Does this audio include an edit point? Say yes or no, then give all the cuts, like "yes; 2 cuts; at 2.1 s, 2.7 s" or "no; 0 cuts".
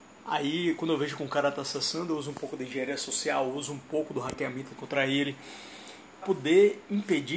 yes; 2 cuts; at 4.8 s, 6.2 s